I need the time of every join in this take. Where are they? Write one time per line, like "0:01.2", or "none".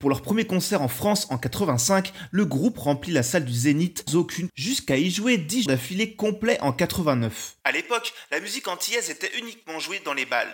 0:04.1
0:04.5
0:05.7